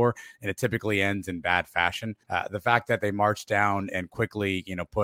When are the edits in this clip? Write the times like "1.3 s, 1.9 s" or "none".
2.2 s, 3.9 s